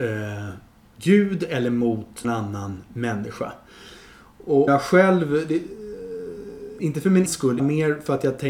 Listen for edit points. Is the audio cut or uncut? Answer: cut